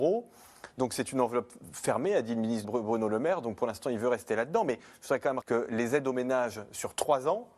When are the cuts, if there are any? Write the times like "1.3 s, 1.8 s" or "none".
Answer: 2.6 s, 5.4 s